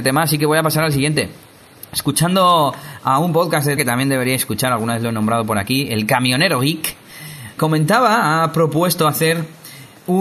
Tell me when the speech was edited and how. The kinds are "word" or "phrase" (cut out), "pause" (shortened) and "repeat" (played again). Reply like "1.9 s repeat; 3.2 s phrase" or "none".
3.8 s word; 7.6 s word

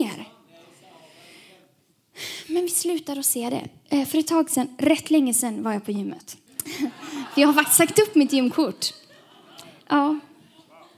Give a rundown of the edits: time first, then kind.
6.5 s pause

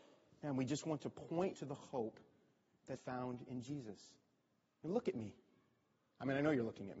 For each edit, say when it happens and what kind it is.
1.5 s word; 3.0 s word

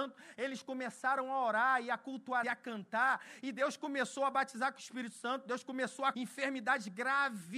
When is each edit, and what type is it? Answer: 2.4 s phrase; 6.1 s word

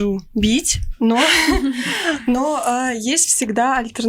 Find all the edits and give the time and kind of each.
none

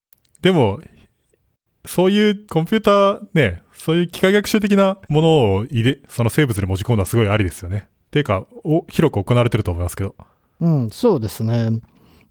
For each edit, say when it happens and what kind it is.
2.4 s pause; 5.0 s pause

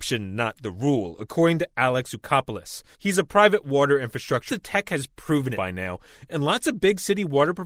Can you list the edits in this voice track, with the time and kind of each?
2.9 s pause; 4.5 s phrase; 5.5 s word

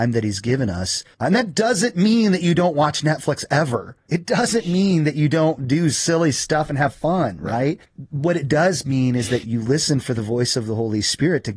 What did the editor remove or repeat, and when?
1.1 s pause; 4.0 s pause; 7.8 s pause; 9.4 s word

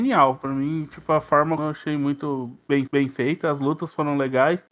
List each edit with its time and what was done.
1.6 s phrase; 2.9 s repeat

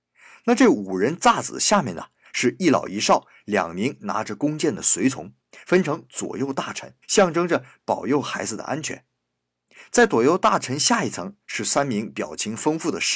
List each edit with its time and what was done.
5.4 s pause; 7.0 s pause

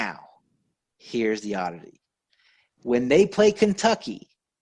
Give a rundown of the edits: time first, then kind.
none

